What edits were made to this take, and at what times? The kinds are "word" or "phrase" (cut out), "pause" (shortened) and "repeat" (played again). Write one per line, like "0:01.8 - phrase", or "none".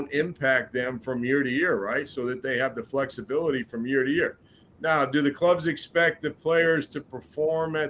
none